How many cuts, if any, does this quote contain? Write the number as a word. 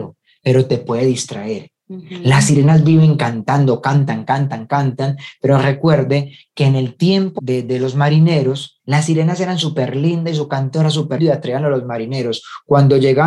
four